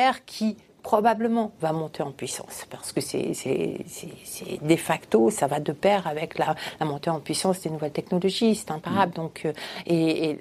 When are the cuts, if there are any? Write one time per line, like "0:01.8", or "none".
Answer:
none